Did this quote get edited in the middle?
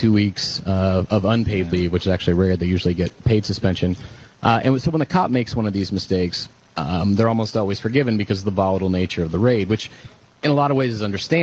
no; 0 cuts

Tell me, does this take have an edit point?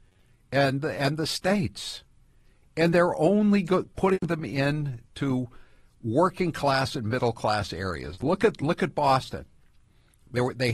no; 0 cuts

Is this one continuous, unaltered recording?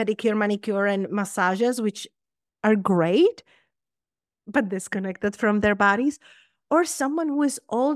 yes; 0 cuts

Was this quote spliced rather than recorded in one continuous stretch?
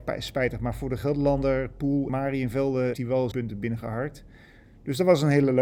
yes; 3 cuts; at 2.1 s, 2.9 s, 3.3 s

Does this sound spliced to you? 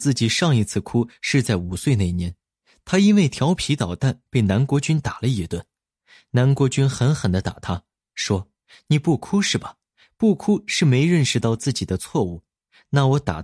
no; 0 cuts

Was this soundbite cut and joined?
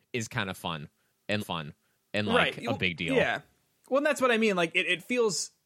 yes; 1 cut; at 1.4 s

